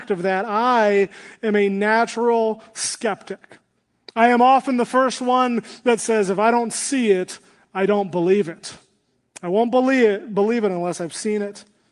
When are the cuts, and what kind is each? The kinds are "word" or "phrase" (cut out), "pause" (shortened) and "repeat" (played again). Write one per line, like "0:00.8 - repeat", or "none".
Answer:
none